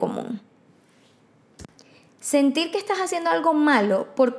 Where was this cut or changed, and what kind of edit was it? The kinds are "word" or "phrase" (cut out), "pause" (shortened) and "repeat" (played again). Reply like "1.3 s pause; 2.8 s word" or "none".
none